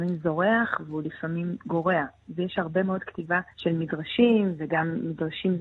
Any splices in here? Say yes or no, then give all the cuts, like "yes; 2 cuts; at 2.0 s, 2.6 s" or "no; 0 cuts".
yes; 1 cut; at 3.5 s